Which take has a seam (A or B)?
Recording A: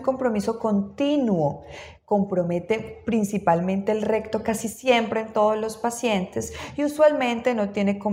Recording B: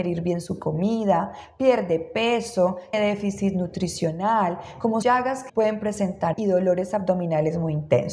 B